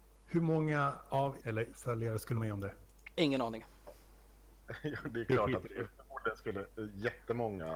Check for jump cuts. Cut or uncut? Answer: cut